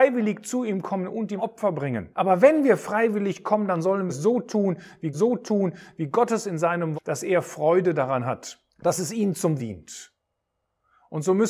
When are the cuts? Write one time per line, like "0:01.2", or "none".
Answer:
0:01.4
0:02.1
0:04.1
0:05.1
0:06.9
0:08.7
0:09.6